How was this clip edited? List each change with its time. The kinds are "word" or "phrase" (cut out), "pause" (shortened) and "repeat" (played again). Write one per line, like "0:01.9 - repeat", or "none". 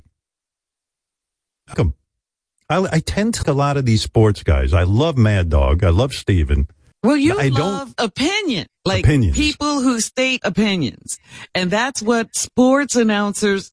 0:01.7 - word
0:03.4 - word
0:06.9 - pause
0:08.8 - pause
0:10.4 - word